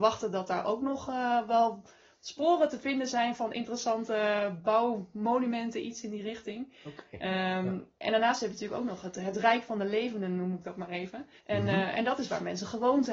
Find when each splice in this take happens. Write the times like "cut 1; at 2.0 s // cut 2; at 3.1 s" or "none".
cut 1; at 11.4 s

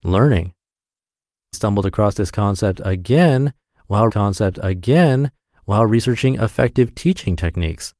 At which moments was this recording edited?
cut 1; at 1.5 s // cut 2; at 4.1 s

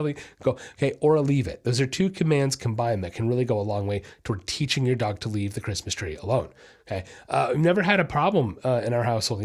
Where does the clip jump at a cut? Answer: none

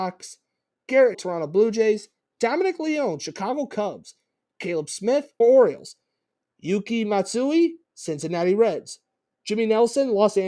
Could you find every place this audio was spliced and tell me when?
cut 1; at 1.1 s // cut 2; at 5.4 s

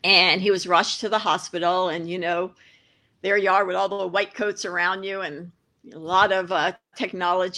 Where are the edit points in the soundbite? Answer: none

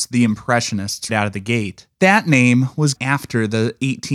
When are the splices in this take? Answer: cut 1; at 1.1 s // cut 2; at 1.9 s // cut 3; at 3.0 s

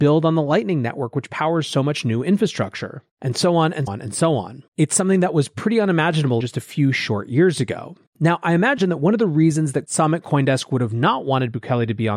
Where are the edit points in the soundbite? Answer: cut 1; at 3.1 s // cut 2; at 3.9 s // cut 3; at 4.7 s // cut 4; at 6.4 s // cut 5; at 8.1 s

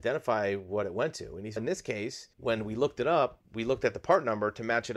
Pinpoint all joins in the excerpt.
cut 1; at 1.6 s // cut 2; at 2.3 s

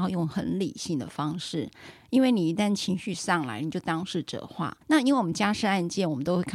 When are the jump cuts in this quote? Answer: cut 1; at 4.8 s

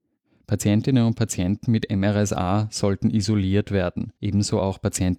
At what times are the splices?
cut 1; at 4.2 s

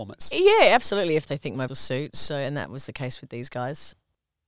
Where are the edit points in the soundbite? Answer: cut 1; at 1.7 s

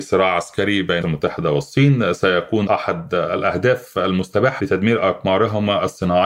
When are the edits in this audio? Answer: cut 1; at 1.0 s // cut 2; at 2.7 s // cut 3; at 4.6 s

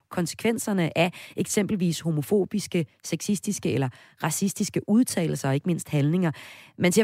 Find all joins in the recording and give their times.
none

